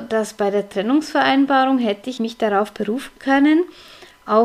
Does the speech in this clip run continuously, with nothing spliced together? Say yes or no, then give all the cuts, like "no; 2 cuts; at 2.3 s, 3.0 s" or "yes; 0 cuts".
no; 1 cut; at 2.2 s